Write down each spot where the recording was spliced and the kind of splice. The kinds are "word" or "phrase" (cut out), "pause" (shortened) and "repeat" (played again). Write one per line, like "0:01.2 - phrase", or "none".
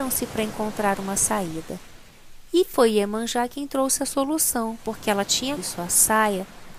0:05.6 - phrase